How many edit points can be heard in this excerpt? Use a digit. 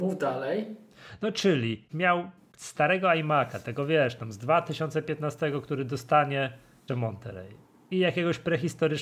2